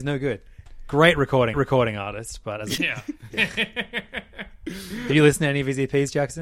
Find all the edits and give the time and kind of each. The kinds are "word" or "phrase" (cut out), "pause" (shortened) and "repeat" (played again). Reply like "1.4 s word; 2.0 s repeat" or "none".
1.5 s repeat; 2.8 s word